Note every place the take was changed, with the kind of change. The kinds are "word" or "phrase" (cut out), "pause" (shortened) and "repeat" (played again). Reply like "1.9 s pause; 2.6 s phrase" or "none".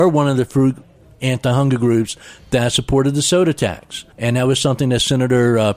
4.1 s pause